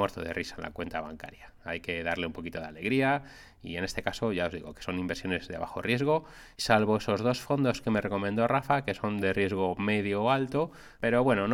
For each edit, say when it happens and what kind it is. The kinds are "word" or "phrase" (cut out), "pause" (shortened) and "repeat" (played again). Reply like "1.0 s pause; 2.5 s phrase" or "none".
6.5 s pause